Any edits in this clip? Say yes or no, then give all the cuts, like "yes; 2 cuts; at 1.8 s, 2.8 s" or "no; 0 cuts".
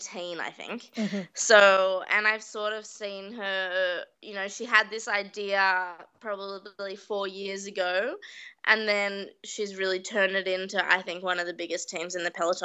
yes; 1 cut; at 4.1 s